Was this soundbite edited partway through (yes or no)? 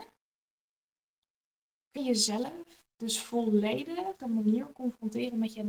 yes